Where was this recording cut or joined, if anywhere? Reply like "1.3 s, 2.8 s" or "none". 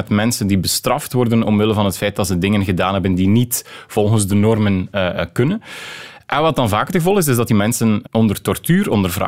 8.0 s